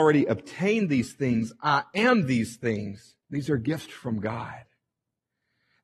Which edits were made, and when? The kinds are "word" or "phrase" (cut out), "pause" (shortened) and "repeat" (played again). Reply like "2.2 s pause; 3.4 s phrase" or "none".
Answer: 3.2 s pause